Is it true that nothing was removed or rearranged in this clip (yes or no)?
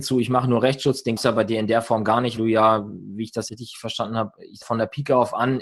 no